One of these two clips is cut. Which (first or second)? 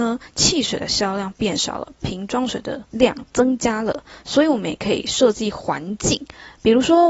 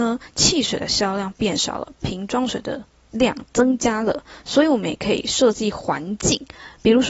first